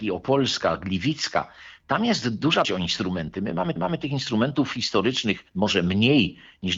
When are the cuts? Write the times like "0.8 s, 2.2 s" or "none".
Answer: 2.6 s, 3.8 s, 5.5 s